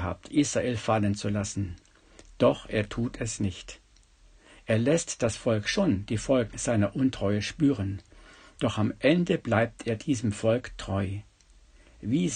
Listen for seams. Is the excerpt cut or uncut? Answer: uncut